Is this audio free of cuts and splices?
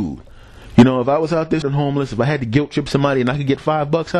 no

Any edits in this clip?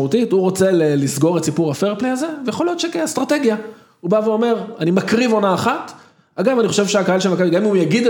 no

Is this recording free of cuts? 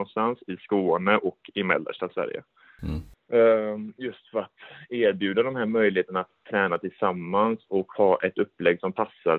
yes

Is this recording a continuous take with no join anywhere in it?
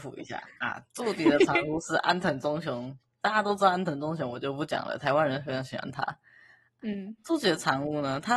yes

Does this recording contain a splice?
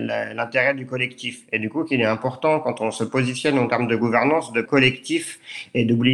yes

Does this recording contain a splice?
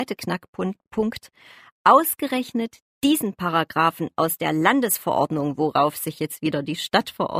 no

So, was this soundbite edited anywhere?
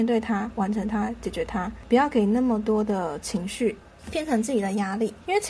no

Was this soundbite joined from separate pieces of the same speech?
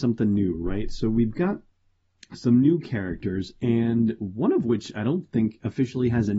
no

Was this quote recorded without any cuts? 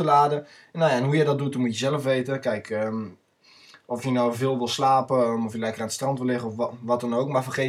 yes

